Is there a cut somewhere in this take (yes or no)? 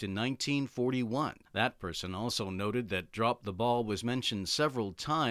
yes